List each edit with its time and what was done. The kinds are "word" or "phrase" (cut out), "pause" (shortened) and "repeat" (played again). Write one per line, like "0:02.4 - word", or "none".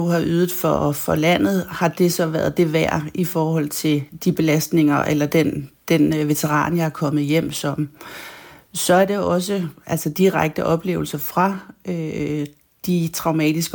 none